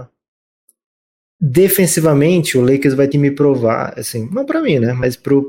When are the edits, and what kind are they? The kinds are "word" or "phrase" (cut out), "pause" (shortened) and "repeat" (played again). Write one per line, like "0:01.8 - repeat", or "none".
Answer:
0:03.1 - phrase